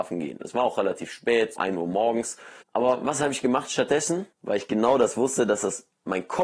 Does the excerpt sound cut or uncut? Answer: cut